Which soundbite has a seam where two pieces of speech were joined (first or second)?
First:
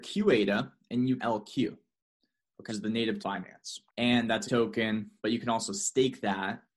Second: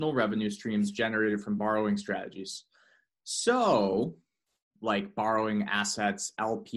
first